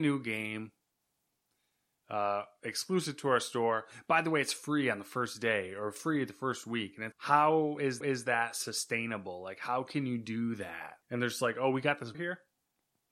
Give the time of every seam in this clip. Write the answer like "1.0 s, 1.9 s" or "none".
7.1 s, 8.0 s, 11.0 s, 12.1 s